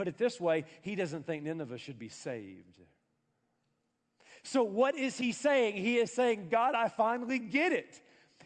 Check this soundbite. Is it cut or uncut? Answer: uncut